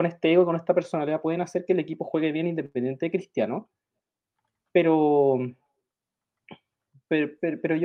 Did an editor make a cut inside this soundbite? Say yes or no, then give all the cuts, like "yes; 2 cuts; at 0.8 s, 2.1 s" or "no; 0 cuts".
no; 0 cuts